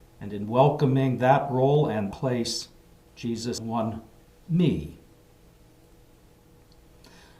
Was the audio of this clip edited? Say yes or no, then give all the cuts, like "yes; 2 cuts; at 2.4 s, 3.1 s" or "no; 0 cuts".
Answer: yes; 3 cuts; at 2.1 s, 3.6 s, 4.5 s